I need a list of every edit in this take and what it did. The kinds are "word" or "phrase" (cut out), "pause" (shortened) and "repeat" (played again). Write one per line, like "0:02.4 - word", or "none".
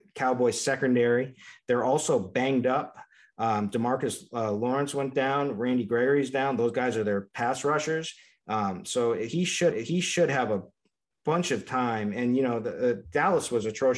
0:09.7 - repeat

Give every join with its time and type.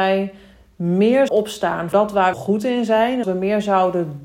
0:01.3 - word
0:01.9 - word
0:02.3 - phrase
0:03.2 - word

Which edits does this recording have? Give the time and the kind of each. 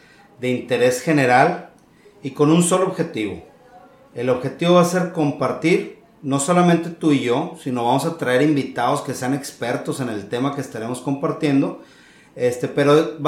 none

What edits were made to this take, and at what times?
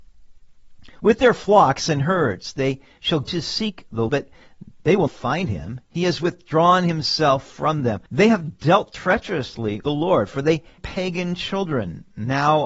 0:00.9 - pause
0:03.2 - word
0:04.1 - word
0:05.1 - word
0:08.1 - pause
0:09.8 - word
0:10.8 - phrase

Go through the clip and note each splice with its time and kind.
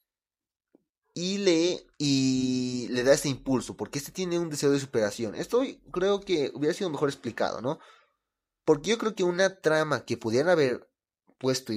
0:01.9 - pause

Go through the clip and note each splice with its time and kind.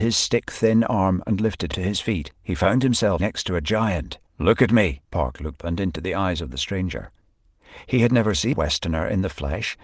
0:01.7 - word
0:02.3 - pause
0:03.2 - word
0:04.3 - pause
0:05.0 - pause
0:05.6 - word
0:08.5 - word

